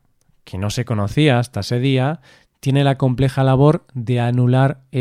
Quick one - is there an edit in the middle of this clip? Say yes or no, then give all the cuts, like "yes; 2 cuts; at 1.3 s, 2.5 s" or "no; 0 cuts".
no; 0 cuts